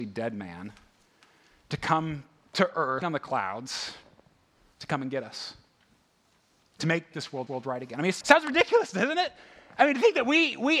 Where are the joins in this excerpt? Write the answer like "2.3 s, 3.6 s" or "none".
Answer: 3.0 s, 7.1 s, 7.5 s, 8.2 s